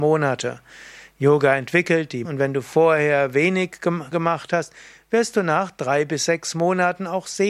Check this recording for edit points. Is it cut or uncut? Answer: cut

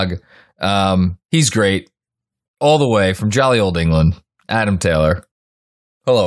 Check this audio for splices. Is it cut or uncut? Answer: uncut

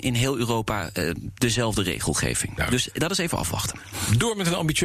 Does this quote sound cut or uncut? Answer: uncut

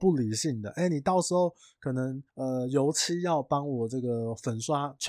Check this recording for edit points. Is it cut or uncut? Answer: cut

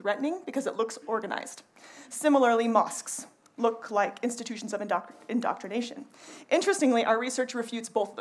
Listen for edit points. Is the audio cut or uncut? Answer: uncut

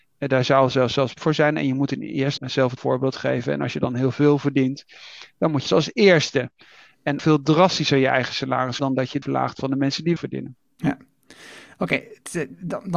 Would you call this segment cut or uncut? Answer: cut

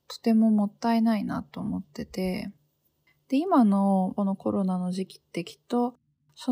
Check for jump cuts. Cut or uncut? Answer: uncut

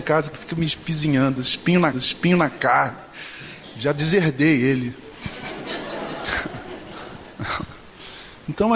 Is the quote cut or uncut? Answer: cut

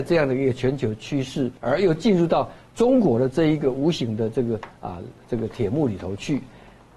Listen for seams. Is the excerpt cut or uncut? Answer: cut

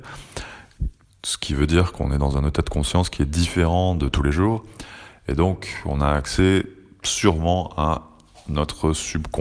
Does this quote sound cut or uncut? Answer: uncut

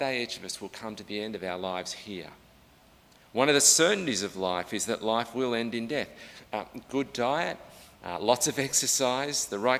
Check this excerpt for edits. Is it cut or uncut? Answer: cut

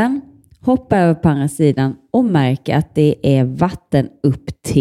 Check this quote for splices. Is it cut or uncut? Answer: uncut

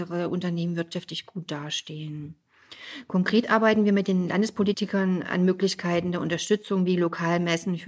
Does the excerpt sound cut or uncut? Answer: uncut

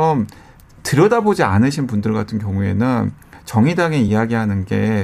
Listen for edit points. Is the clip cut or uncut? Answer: uncut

